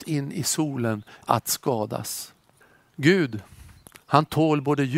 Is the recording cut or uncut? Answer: cut